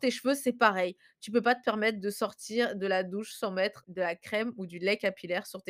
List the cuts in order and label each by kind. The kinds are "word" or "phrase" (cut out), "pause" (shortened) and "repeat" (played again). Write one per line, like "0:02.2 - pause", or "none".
0:03.8 - word

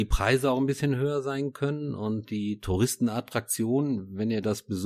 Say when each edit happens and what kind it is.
none

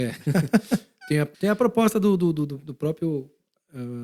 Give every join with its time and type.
0:01.3 - pause

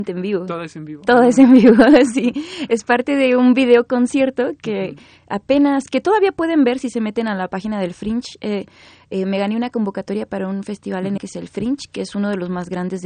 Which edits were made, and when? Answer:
0:11.2 - word

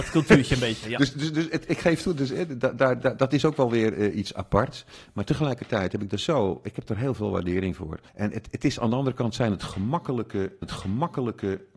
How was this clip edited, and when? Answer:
0:08.1 - pause
0:10.6 - repeat

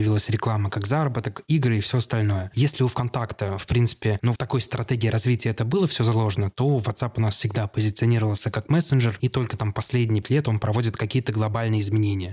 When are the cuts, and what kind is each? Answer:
0:04.4 - word
0:10.2 - word

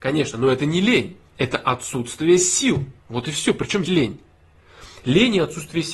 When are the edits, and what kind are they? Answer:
0:01.2 - pause
0:03.0 - pause
0:03.9 - word

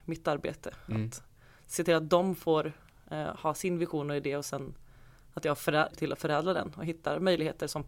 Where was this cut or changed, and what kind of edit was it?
0:05.9 - word

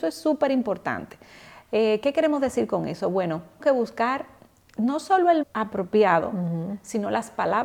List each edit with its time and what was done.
0:03.6 - word
0:05.4 - word

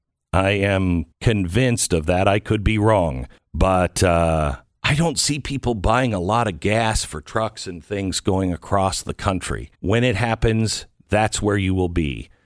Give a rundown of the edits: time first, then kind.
0:01.1 - pause
0:03.4 - pause
0:09.7 - pause

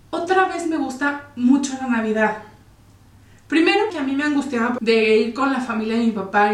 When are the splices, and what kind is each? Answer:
0:03.9 - phrase
0:04.8 - word

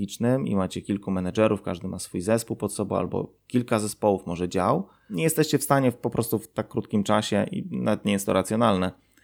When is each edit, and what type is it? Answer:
none

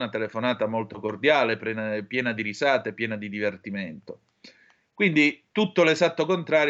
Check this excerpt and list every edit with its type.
none

